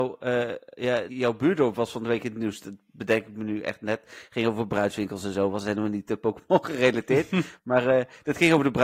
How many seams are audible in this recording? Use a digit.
1